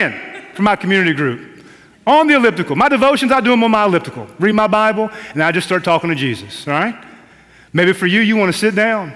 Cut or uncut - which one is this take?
uncut